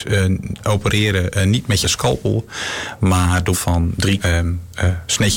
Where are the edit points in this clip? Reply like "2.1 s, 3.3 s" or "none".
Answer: 1.8 s, 3.5 s, 4.2 s